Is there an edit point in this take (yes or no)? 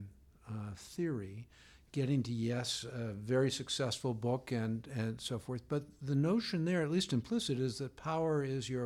no